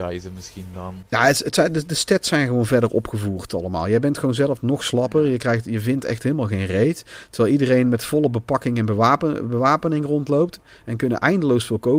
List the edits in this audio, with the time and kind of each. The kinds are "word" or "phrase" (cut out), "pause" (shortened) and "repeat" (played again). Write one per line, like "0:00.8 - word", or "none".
none